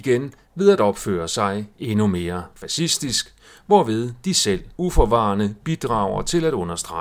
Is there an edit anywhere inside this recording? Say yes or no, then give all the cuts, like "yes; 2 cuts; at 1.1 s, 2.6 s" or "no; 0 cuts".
yes; 1 cut; at 4.8 s